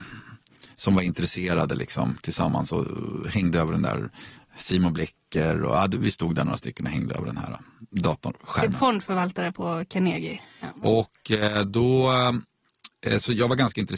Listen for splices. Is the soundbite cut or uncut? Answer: uncut